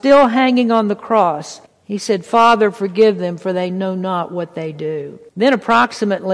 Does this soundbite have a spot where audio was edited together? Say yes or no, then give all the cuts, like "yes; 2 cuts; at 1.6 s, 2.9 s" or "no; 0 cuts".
yes; 2 cuts; at 1.7 s, 5.3 s